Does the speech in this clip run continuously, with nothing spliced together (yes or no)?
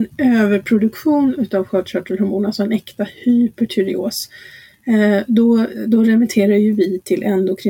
yes